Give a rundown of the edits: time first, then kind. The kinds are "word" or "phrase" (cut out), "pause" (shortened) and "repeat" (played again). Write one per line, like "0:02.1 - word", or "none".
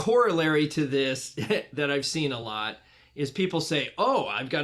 none